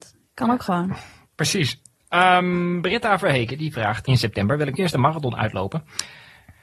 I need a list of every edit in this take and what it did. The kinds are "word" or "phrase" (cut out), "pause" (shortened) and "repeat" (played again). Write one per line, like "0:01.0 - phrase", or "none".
0:04.0 - phrase
0:04.7 - word